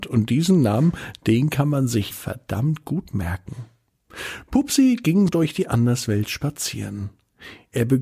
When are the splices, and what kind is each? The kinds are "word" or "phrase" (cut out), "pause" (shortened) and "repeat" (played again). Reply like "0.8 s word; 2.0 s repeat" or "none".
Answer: 2.1 s word; 5.3 s word